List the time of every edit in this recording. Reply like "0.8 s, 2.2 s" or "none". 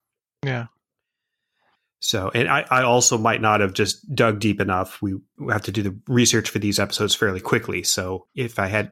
none